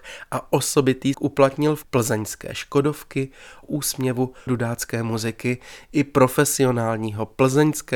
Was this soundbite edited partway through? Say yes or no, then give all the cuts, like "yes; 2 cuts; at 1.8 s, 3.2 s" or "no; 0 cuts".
yes; 4 cuts; at 1.1 s, 1.8 s, 3.6 s, 4.5 s